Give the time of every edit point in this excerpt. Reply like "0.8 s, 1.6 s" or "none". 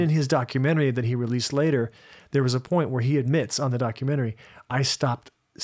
none